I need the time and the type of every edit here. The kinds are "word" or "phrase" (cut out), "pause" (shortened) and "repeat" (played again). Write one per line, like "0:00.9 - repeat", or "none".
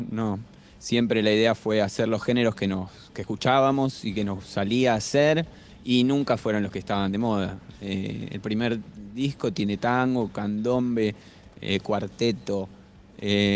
none